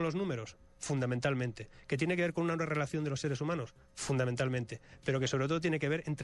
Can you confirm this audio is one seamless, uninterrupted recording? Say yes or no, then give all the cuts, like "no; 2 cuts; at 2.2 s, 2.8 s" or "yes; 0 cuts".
yes; 0 cuts